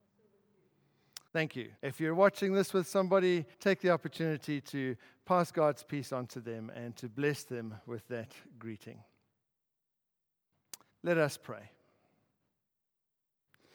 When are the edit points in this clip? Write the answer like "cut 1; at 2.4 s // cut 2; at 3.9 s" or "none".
cut 1; at 1.3 s // cut 2; at 1.8 s // cut 3; at 3.5 s // cut 4; at 10.9 s

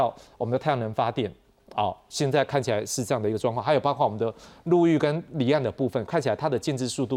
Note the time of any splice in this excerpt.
none

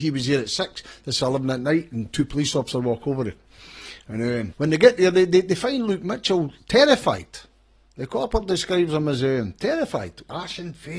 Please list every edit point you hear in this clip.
cut 1; at 4.5 s

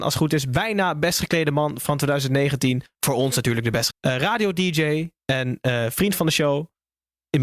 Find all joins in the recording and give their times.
cut 1; at 3.9 s

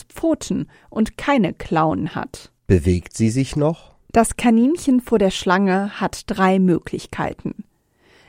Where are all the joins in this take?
cut 1; at 2.6 s // cut 2; at 4.0 s

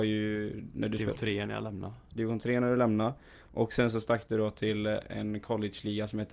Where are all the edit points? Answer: cut 1; at 1.1 s

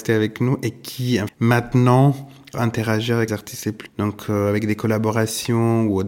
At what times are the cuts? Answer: cut 1; at 1.3 s // cut 2; at 2.5 s // cut 3; at 3.3 s // cut 4; at 3.9 s

